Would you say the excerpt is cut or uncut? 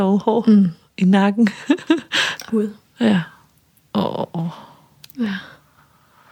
cut